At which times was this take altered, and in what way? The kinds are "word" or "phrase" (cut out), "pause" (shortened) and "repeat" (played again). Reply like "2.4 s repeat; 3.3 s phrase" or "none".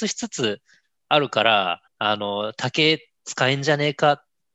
1.9 s pause